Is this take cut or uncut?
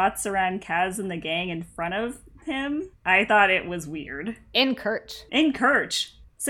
cut